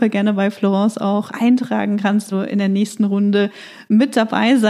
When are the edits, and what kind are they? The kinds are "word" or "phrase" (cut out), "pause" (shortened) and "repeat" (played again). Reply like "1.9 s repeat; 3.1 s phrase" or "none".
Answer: 1.3 s word; 2.3 s word